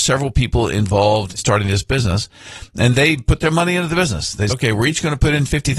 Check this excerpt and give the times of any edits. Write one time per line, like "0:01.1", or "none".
0:01.4
0:04.5